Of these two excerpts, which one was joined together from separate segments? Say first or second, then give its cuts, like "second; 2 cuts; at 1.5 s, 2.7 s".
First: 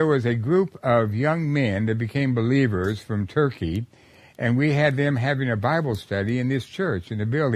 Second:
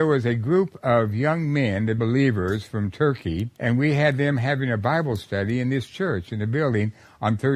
second; 2 cuts; at 2.0 s, 3.5 s